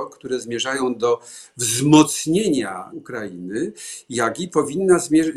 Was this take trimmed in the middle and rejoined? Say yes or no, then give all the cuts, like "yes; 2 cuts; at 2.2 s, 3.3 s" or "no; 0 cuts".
yes; 1 cut; at 2.9 s